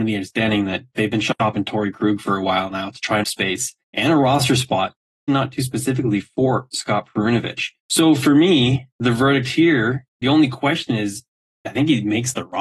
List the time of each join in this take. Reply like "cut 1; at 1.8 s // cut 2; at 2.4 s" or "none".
cut 1; at 3.2 s // cut 2; at 3.8 s // cut 3; at 5.3 s // cut 4; at 7.8 s